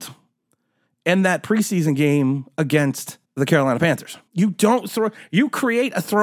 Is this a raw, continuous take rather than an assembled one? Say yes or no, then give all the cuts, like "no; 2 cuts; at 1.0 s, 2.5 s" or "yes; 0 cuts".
no; 2 cuts; at 3.2 s, 4.3 s